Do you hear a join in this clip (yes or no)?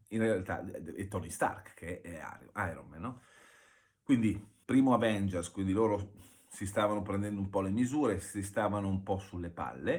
yes